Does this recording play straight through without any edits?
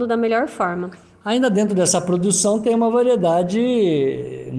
yes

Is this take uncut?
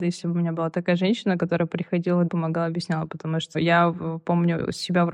no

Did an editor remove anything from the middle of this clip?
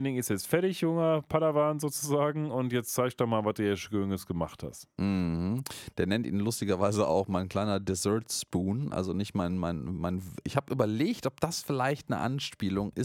no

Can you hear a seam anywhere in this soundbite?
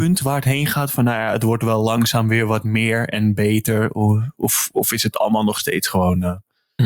no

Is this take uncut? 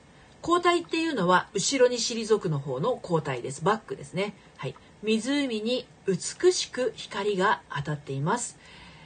no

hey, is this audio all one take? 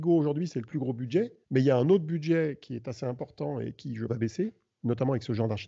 no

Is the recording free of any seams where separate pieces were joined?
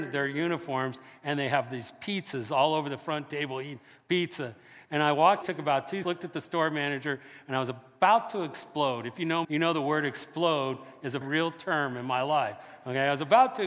no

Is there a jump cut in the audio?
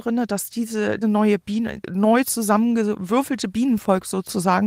yes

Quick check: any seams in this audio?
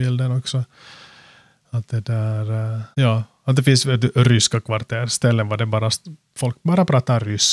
yes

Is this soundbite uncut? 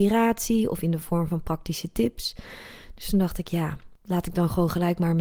yes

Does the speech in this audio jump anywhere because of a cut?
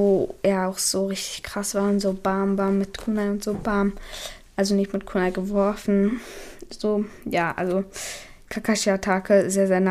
no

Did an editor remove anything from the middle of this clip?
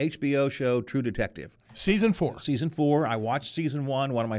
yes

